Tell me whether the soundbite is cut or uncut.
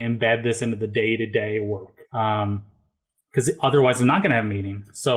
cut